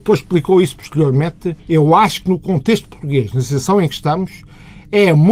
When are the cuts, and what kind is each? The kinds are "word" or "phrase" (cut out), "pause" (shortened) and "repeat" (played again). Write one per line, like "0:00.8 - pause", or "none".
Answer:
0:01.6 - pause